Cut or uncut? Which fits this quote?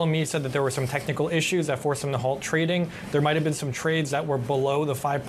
uncut